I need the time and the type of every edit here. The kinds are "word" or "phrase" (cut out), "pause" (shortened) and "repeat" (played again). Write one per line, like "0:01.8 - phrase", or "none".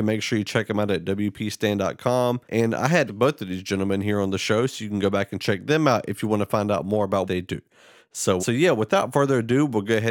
0:02.4 - pause
0:03.1 - word
0:07.3 - word
0:08.4 - word